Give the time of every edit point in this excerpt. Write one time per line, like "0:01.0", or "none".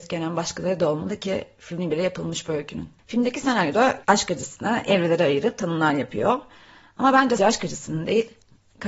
0:04.0
0:07.4